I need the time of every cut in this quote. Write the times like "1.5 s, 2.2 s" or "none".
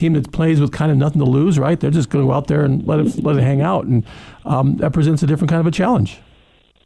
none